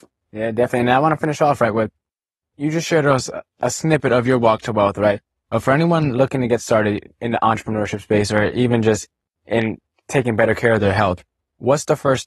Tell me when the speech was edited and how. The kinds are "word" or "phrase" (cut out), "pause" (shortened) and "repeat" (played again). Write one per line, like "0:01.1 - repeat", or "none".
none